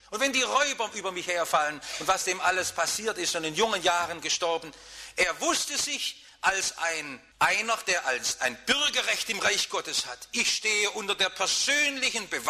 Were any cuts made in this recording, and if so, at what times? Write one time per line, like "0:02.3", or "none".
0:07.3